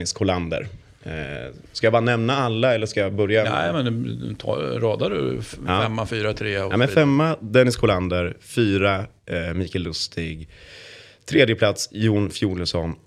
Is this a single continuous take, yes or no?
yes